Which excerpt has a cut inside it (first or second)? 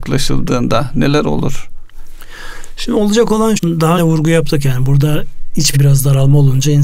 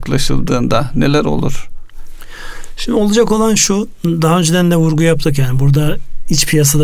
first